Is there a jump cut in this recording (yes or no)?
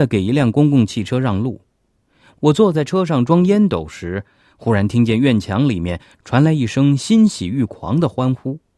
no